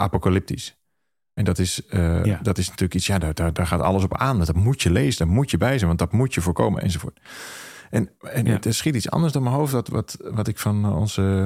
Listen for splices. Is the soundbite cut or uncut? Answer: cut